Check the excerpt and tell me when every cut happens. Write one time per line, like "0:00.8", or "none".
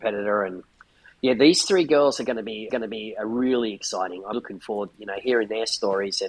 0:02.7
0:04.3
0:04.9